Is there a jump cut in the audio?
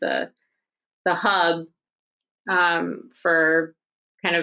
no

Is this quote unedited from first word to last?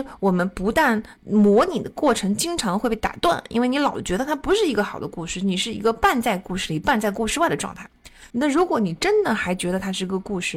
no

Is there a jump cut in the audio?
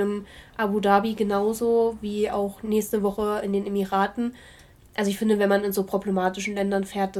no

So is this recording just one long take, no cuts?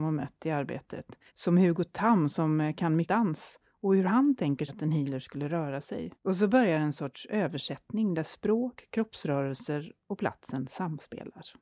no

